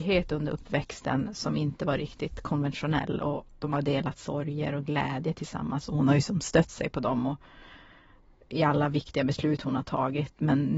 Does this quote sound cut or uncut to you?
uncut